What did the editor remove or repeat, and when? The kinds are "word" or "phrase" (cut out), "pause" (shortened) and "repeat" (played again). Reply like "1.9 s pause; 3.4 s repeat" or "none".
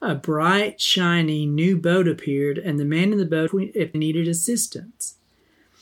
3.5 s phrase; 3.9 s word

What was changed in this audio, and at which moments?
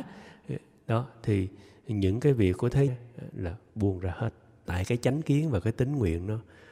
2.9 s word; 4.7 s word

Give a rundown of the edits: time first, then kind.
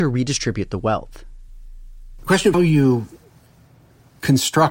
2.5 s word

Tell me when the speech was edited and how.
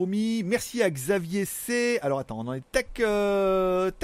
2.6 s phrase

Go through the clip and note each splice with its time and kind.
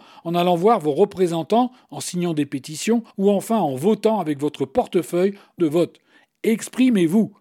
3.1 s pause; 5.6 s phrase

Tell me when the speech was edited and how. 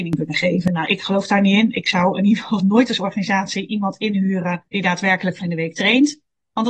2.6 s word; 4.7 s pause; 5.4 s phrase

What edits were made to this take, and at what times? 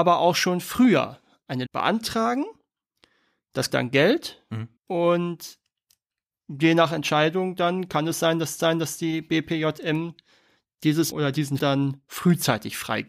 1.7 s word; 3.7 s word; 4.8 s pause; 8.6 s repeat; 11.1 s word; 11.6 s word

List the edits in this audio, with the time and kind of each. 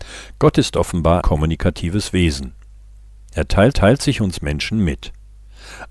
1.2 s word; 3.7 s repeat

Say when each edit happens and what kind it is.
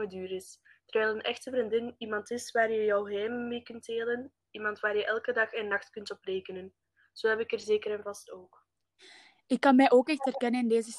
none

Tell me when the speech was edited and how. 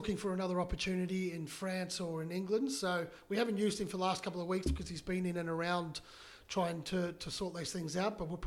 none

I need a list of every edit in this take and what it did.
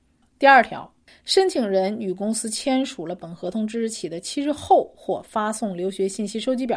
1.1 s pause

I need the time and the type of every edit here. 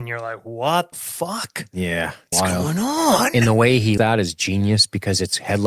0.9 s word; 2.3 s word; 4.0 s word

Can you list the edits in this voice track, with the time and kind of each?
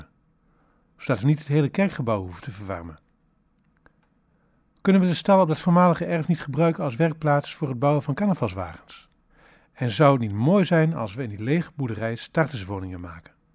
9.3 s pause

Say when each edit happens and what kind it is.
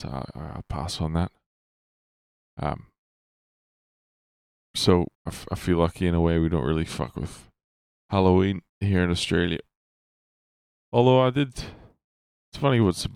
5.1 s pause; 8.7 s pause

